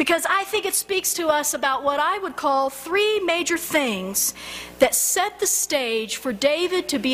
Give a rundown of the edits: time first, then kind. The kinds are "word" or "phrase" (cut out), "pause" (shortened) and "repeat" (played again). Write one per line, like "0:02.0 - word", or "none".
none